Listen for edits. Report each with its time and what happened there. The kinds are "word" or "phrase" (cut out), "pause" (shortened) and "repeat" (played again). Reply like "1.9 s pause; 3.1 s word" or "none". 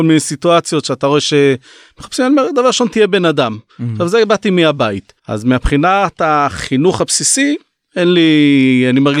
5.2 s pause